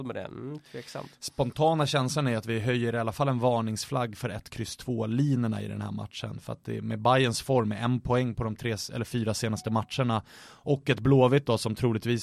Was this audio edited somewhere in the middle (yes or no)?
no